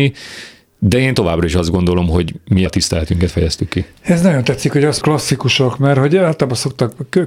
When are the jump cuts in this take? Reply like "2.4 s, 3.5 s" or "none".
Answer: 2.7 s, 5.0 s